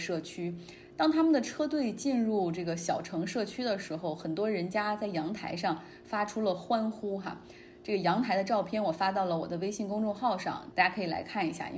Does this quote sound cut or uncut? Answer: cut